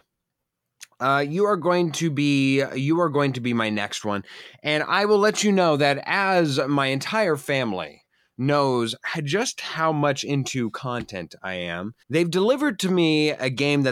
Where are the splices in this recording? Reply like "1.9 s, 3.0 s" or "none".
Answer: 12.0 s

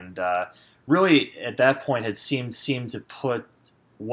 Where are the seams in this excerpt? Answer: 2.5 s

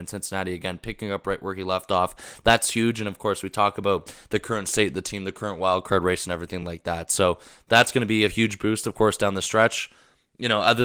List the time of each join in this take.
none

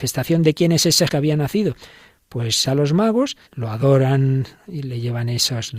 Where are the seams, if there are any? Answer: 1.1 s, 2.6 s, 3.5 s

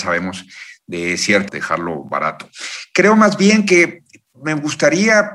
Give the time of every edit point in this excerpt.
1.5 s

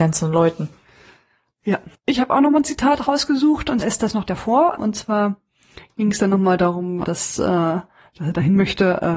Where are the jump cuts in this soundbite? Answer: 3.8 s, 4.3 s, 4.8 s, 7.0 s

